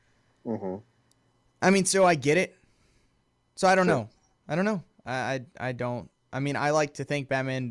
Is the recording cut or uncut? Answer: uncut